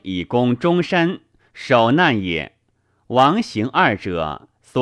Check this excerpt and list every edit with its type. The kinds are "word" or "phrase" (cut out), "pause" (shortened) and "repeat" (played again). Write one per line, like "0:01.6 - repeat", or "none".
none